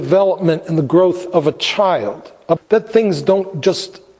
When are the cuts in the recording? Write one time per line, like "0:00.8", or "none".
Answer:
0:02.6